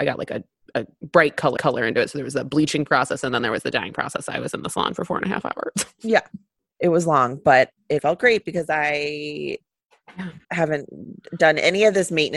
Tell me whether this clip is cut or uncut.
cut